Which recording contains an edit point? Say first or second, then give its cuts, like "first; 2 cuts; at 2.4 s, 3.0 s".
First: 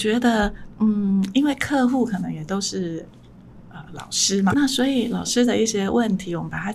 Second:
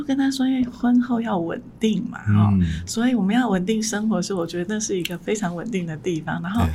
first; 1 cut; at 4.5 s